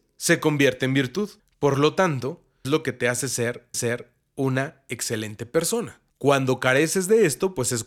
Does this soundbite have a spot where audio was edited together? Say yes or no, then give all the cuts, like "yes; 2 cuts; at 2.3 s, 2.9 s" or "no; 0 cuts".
yes; 4 cuts; at 1.4 s, 2.6 s, 3.7 s, 6.1 s